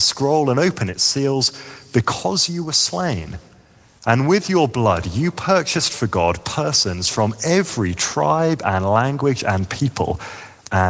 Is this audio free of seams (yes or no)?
yes